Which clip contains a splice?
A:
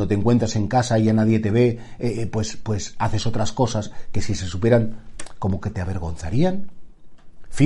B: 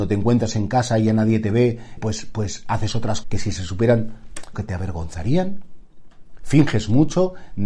B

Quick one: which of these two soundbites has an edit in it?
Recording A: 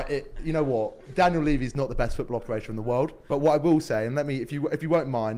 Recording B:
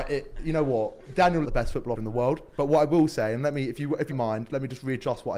B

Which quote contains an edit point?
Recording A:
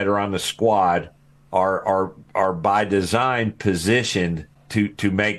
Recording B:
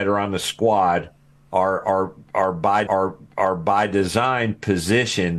B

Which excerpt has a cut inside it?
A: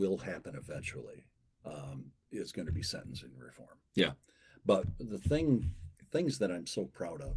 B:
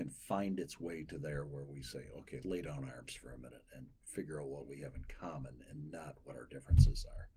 B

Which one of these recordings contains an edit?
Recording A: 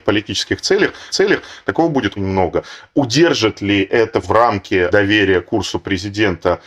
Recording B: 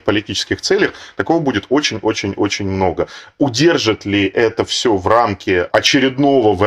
A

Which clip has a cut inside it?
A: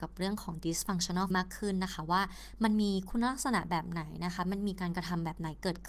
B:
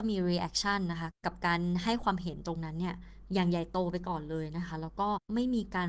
A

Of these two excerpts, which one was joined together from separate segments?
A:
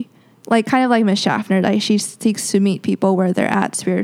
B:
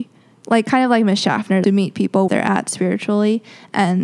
B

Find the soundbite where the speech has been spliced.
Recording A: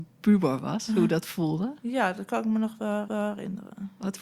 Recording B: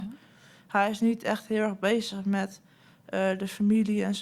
A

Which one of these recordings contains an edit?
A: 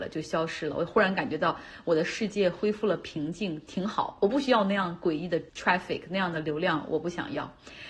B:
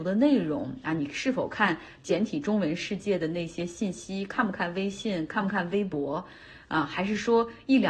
A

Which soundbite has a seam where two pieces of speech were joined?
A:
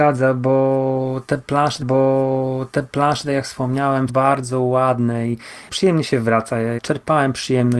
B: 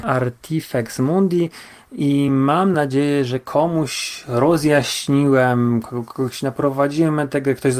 A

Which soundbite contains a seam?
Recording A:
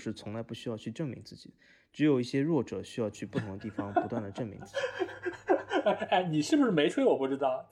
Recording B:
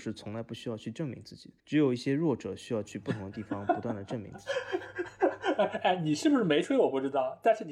B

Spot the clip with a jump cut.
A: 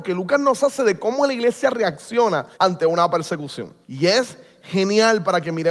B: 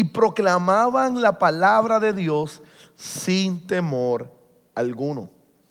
A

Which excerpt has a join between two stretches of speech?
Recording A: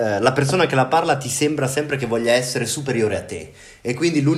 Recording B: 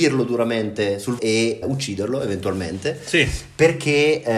B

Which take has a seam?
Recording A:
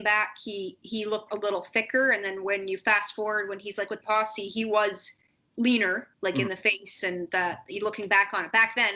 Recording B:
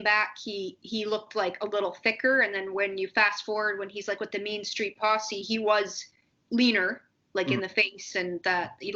A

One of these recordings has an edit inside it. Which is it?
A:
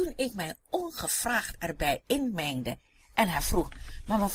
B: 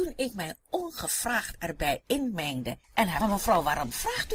B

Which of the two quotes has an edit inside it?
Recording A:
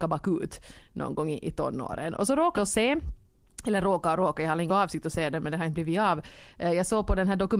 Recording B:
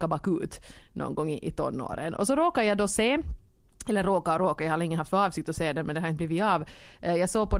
A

